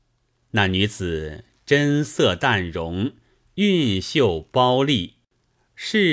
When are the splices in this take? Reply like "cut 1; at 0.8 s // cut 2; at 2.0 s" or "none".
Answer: none